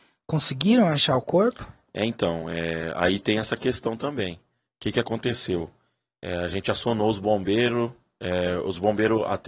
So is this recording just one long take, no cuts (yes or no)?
yes